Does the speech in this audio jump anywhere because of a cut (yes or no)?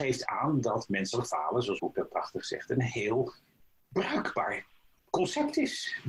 yes